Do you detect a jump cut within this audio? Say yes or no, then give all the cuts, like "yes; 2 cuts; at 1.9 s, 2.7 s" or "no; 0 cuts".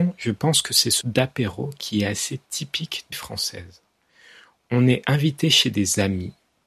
yes; 2 cuts; at 1.0 s, 3.1 s